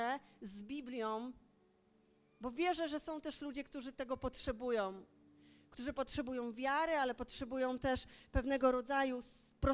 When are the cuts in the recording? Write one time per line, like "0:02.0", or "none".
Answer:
none